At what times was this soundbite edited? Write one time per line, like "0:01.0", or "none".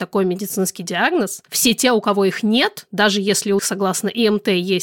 0:01.5
0:03.6